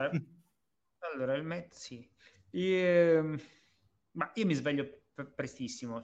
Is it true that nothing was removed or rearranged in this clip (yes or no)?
yes